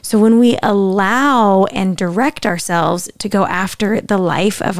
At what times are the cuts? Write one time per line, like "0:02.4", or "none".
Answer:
none